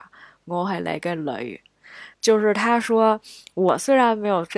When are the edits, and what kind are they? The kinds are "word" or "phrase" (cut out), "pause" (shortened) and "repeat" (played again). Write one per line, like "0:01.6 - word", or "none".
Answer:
0:02.1 - pause